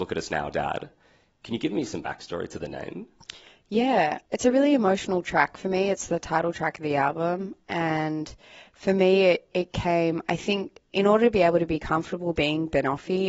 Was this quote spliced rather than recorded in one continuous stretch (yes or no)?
no